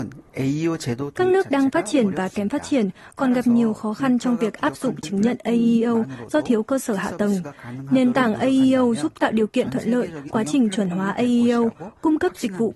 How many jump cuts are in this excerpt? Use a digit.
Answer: 1